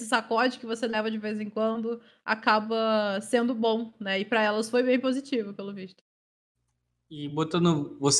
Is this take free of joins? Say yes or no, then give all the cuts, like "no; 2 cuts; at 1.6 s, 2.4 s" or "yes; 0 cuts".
yes; 0 cuts